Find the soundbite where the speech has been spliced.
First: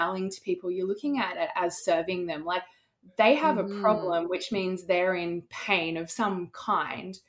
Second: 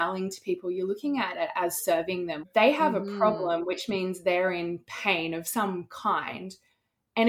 second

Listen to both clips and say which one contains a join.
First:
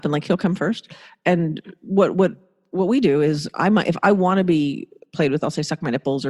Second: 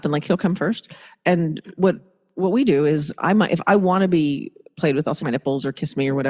second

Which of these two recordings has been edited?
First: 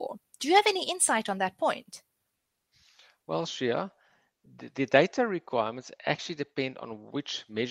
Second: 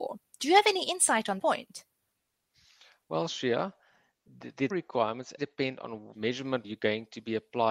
second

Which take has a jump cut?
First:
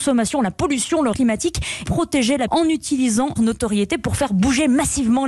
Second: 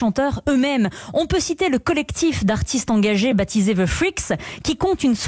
first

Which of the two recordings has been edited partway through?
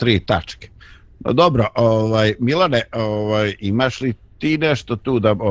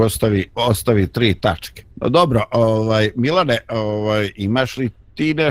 second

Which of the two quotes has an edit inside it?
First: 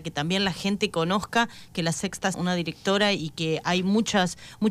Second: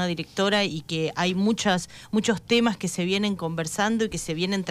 first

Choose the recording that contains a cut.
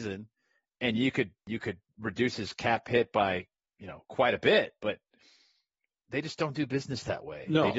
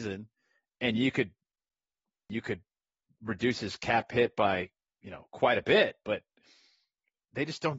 first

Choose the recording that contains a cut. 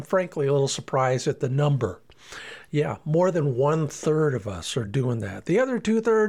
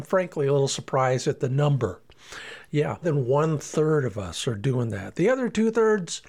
second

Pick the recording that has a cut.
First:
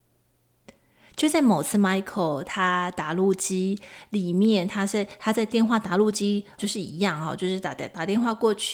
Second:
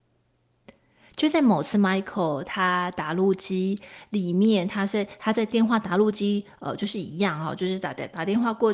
first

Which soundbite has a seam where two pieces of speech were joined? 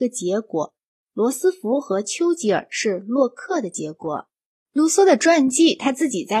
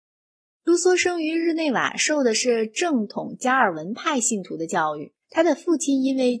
second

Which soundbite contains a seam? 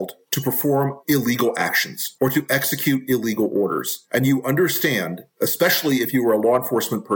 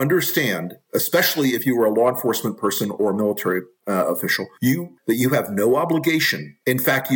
second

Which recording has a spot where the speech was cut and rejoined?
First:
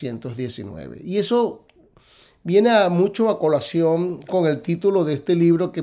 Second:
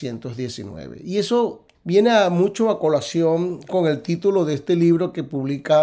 second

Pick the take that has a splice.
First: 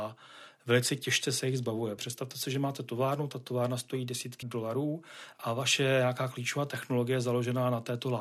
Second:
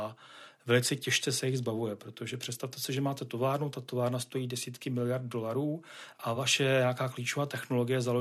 first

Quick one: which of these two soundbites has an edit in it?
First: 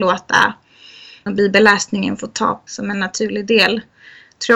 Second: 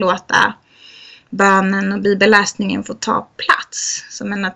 first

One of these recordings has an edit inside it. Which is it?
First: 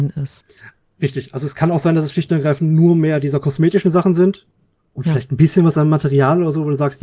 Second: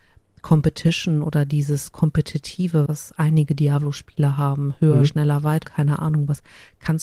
second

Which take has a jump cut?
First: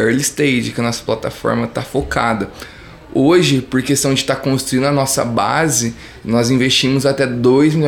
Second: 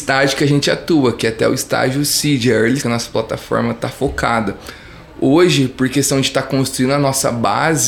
second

